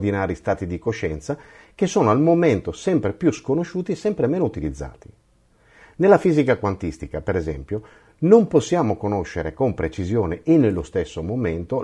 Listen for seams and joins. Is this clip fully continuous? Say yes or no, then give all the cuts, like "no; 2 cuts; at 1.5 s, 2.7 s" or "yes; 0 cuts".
yes; 0 cuts